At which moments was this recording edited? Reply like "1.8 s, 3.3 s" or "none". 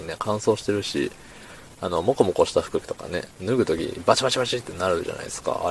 3.3 s